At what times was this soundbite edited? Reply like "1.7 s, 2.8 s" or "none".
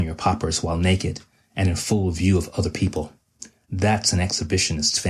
none